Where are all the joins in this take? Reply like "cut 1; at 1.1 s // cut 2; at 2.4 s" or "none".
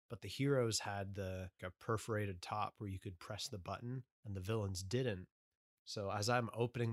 cut 1; at 1.6 s // cut 2; at 4.1 s